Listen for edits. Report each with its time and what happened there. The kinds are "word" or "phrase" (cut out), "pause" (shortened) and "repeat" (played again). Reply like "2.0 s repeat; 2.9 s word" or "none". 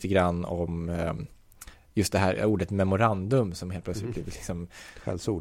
none